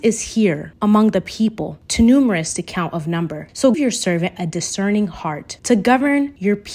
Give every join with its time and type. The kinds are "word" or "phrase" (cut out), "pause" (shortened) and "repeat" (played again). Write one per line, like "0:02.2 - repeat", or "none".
0:03.7 - word